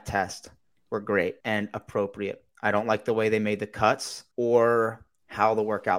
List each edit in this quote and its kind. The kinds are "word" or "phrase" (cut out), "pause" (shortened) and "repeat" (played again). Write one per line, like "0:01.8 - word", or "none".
0:01.4 - pause
0:04.3 - pause